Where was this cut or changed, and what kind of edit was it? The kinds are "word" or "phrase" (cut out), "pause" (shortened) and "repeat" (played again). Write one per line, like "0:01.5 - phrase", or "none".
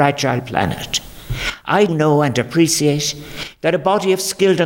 0:01.9 - word